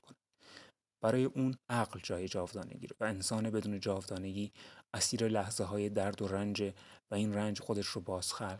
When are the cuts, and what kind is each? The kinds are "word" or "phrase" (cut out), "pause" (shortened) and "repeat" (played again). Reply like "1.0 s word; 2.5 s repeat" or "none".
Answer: 1.6 s pause; 3.0 s word; 7.6 s word